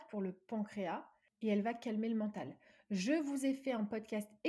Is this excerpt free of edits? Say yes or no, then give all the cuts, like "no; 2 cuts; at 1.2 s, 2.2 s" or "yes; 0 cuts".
yes; 0 cuts